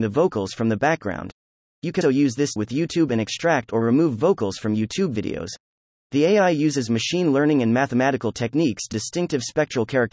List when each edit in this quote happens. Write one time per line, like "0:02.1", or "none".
0:02.0
0:02.6
0:08.9